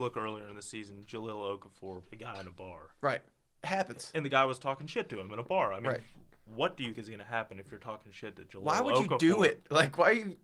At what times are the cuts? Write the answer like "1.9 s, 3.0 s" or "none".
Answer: 2.1 s, 6.9 s